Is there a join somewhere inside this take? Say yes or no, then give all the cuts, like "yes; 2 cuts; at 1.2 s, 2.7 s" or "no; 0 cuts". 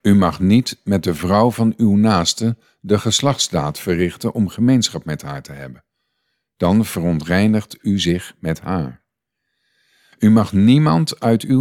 no; 0 cuts